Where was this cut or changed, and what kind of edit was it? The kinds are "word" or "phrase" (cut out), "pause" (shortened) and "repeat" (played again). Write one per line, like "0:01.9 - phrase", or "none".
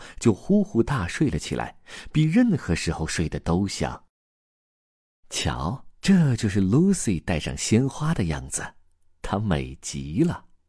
0:05.9 - pause